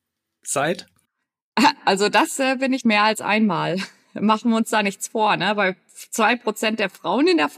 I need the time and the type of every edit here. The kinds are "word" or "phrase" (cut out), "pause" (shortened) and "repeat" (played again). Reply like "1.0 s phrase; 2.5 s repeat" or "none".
2.8 s word

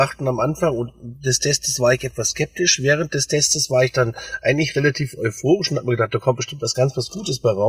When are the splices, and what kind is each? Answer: none

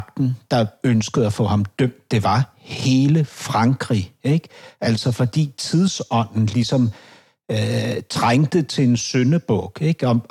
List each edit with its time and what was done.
none

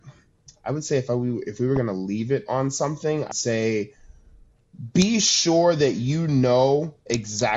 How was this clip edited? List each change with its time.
3.3 s word

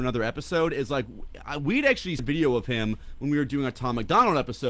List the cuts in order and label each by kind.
2.2 s word

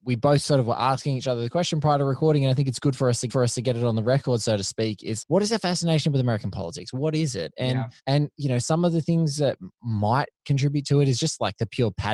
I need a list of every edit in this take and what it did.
3.3 s repeat; 5.2 s word; 8.0 s pause

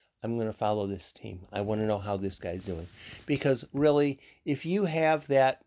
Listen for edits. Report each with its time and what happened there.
none

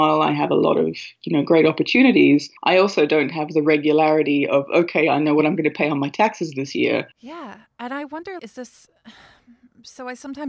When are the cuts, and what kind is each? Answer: 2.6 s pause; 7.1 s pause; 8.4 s word

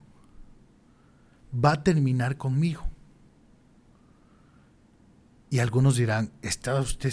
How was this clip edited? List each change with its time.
none

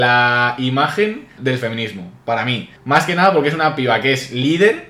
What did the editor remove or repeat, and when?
1.4 s word; 2.8 s pause

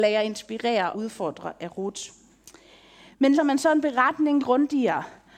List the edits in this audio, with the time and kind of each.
0.9 s word; 3.3 s word; 4.4 s word

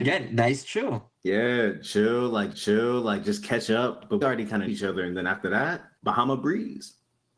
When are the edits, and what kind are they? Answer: 1.2 s pause; 2.5 s repeat; 4.2 s word; 4.7 s word; 6.0 s pause

